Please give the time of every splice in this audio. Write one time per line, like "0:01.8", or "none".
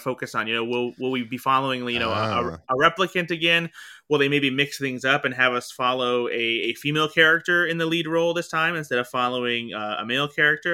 none